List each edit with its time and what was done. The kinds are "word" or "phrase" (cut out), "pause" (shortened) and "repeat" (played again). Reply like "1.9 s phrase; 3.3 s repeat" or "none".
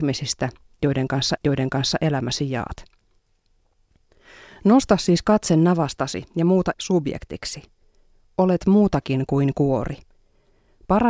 1.4 s repeat; 6.7 s phrase